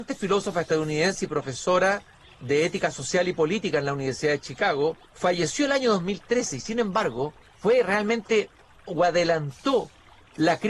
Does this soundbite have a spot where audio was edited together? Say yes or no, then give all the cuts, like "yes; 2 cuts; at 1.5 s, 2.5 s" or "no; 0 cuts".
yes; 4 cuts; at 2.1 s, 5.0 s, 7.4 s, 8.9 s